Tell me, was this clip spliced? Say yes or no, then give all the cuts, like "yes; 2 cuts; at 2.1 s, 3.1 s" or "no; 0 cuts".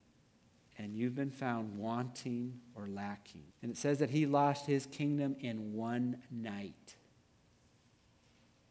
yes; 1 cut; at 3.5 s